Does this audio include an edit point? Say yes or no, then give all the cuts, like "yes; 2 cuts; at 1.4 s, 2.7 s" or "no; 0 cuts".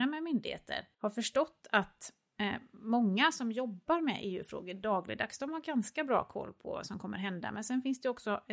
yes; 1 cut; at 0.9 s